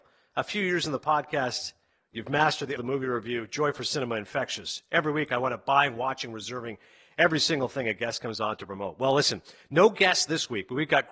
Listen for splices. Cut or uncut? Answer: cut